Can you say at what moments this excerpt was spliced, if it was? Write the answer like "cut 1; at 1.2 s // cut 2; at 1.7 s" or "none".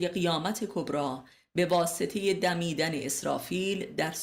none